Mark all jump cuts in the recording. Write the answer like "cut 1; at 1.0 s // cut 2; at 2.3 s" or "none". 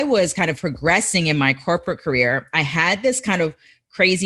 none